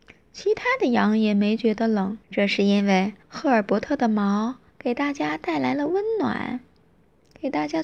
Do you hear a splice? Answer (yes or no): yes